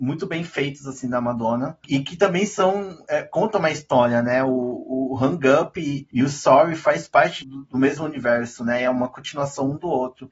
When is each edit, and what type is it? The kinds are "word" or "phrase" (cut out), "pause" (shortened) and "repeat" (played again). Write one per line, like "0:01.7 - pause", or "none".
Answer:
0:07.4 - word